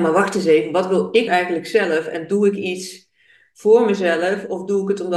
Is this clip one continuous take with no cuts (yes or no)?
no